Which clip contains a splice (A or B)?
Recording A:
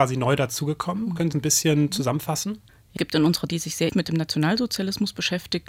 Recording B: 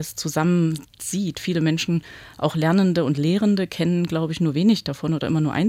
A